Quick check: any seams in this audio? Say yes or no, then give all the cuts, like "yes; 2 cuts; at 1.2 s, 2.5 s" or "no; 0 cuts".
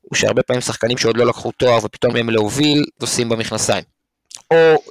yes; 2 cuts; at 2.1 s, 3.0 s